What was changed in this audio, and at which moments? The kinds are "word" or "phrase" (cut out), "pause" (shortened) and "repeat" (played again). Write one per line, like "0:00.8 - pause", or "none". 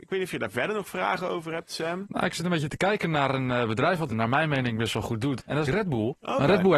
0:04.1 - word
0:05.7 - phrase